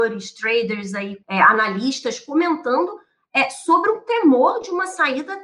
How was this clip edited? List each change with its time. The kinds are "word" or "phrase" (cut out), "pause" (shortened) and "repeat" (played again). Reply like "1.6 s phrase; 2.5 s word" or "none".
1.2 s word